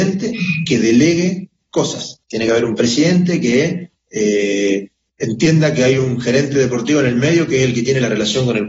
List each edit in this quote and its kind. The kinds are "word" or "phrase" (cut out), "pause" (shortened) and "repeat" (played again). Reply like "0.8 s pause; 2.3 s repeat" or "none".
2.2 s pause